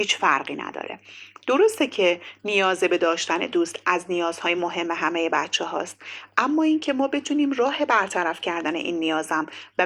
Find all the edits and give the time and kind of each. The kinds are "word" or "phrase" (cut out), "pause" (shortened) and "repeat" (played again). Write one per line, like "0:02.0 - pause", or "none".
none